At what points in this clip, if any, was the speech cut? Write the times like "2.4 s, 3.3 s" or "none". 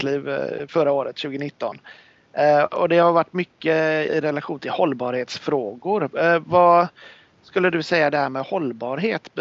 4.1 s